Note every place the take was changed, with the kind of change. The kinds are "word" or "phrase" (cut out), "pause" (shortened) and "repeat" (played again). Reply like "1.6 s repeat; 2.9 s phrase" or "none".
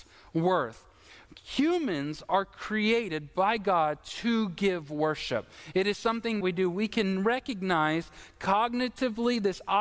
6.4 s word